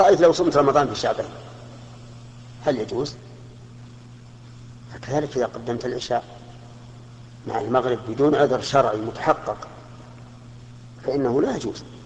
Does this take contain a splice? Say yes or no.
no